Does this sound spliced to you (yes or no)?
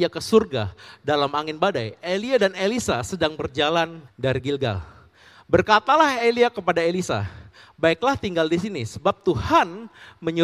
yes